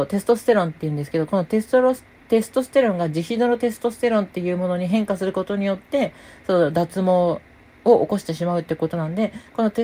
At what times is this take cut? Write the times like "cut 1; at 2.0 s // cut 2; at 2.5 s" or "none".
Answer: none